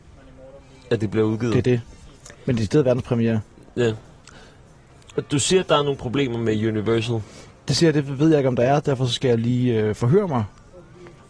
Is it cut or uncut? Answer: uncut